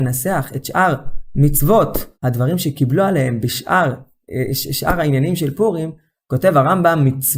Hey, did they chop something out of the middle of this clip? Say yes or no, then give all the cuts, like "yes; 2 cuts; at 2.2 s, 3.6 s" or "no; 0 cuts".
yes; 1 cut; at 2.1 s